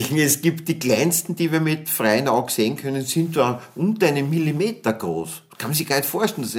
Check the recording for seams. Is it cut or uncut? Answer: uncut